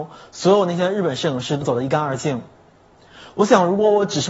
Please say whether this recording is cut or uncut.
uncut